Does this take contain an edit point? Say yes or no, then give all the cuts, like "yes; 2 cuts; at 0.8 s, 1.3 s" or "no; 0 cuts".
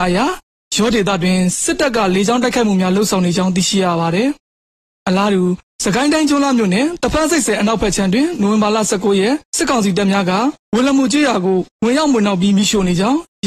yes; 1 cut; at 9.5 s